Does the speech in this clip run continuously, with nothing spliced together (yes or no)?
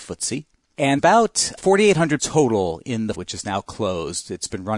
no